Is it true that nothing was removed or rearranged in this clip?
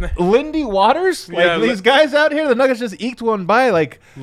yes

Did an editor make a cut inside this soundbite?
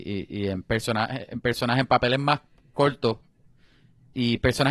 no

